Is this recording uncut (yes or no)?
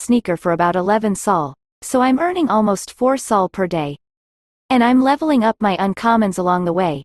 yes